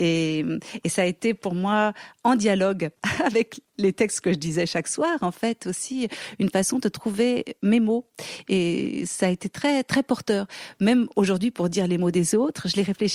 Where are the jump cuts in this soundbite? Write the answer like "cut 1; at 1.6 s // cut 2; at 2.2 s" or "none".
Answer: none

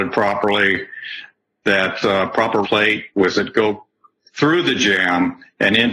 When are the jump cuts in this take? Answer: cut 1; at 2.0 s // cut 2; at 2.6 s // cut 3; at 3.3 s

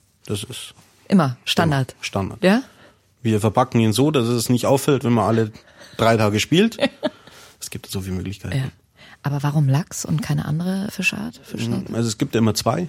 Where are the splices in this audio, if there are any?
none

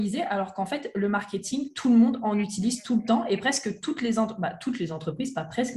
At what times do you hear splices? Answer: none

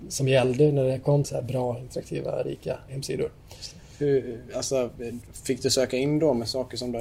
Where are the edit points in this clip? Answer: cut 1; at 1.2 s // cut 2; at 2.9 s

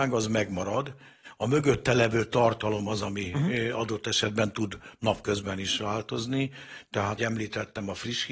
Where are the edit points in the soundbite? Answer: cut 1; at 7.2 s

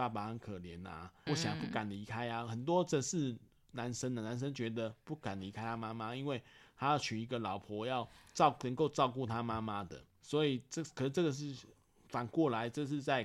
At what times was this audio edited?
cut 1; at 1.3 s // cut 2; at 10.2 s

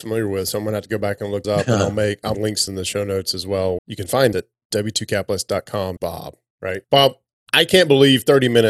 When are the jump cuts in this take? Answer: cut 1; at 1.4 s // cut 2; at 2.3 s // cut 3; at 2.7 s // cut 4; at 3.8 s // cut 5; at 4.3 s // cut 6; at 6.0 s // cut 7; at 6.8 s

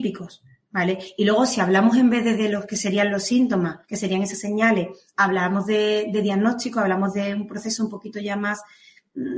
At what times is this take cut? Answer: cut 1; at 3.8 s

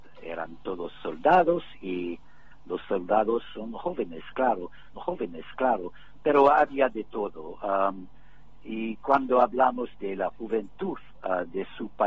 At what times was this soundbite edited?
cut 1; at 5.0 s // cut 2; at 10.0 s

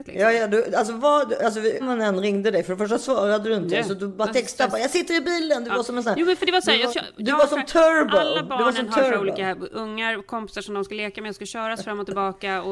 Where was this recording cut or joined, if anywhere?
cut 1; at 1.8 s // cut 2; at 6.9 s

